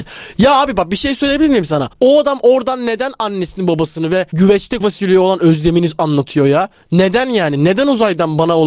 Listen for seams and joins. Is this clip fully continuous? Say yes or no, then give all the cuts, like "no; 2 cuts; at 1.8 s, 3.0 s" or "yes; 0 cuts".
no; 2 cuts; at 1.9 s, 4.8 s